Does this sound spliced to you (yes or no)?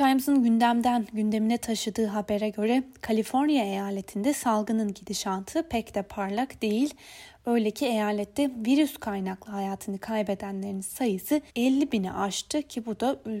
yes